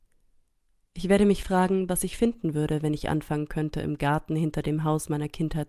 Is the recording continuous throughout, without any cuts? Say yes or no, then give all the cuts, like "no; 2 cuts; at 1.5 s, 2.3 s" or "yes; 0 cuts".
yes; 0 cuts